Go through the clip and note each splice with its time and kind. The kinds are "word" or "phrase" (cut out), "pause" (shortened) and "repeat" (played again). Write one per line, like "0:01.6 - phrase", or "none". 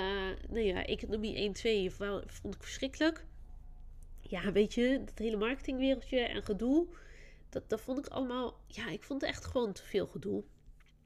none